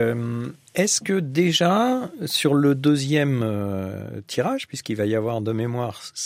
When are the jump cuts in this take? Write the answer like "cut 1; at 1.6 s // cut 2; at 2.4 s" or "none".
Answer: none